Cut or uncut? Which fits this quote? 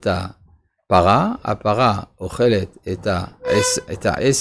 uncut